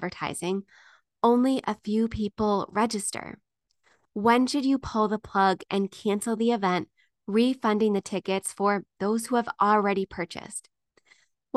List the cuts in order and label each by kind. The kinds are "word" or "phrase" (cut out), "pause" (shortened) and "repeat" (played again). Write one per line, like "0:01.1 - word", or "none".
none

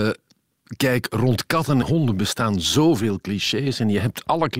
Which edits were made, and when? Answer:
0:01.8 - word

